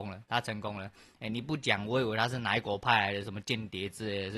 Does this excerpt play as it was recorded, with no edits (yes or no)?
yes